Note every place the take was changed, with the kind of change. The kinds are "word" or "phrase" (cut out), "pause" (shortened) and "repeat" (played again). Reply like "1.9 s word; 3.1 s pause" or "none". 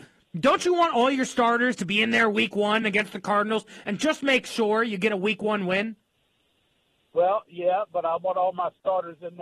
none

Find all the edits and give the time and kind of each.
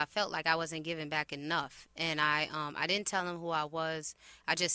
none

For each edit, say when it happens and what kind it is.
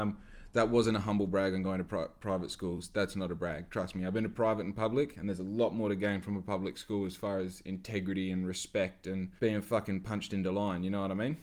9.4 s pause

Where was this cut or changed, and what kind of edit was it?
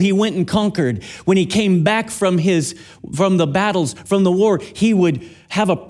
none

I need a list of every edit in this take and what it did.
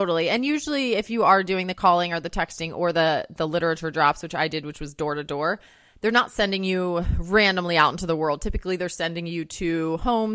none

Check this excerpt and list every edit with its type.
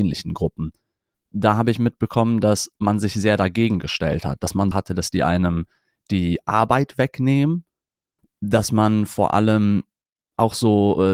4.7 s word

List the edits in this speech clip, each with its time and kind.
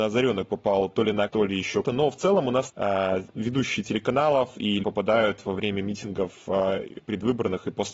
1.3 s word; 1.8 s word; 2.7 s word; 4.8 s word

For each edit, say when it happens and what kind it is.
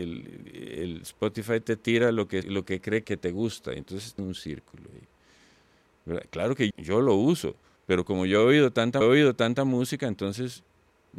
2.4 s word; 3.0 s word; 4.2 s word; 6.7 s word; 7.8 s pause; 9.0 s repeat

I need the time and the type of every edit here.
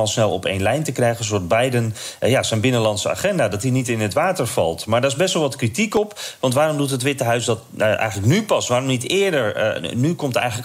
none

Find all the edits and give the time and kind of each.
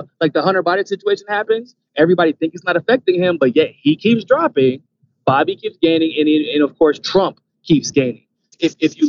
none

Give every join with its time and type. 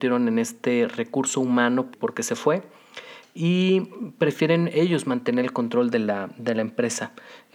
1.9 s word

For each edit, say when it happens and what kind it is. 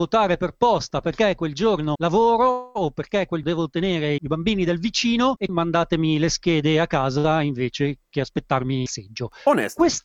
3.4 s word; 5.5 s word; 8.9 s word

